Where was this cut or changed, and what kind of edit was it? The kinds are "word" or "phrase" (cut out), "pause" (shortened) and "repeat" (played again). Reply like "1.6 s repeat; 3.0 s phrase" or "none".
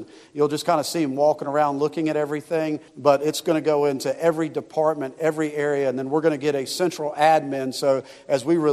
2.9 s pause